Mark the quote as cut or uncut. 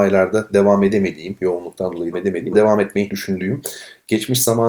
cut